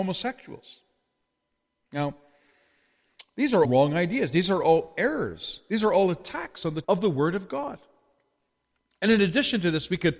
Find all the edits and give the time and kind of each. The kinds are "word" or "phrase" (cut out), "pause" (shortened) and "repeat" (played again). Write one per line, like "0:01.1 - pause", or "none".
0:03.6 - word
0:06.8 - word